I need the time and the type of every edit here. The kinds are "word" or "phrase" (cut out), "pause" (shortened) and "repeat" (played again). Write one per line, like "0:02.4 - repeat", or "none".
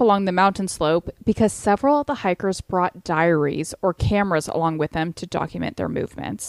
none